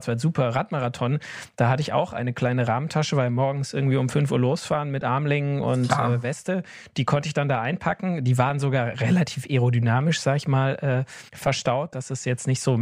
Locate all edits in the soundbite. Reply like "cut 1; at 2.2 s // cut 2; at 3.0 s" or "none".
cut 1; at 11.3 s